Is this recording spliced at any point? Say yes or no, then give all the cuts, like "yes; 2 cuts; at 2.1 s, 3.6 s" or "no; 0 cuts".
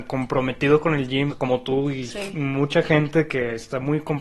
yes; 1 cut; at 1.3 s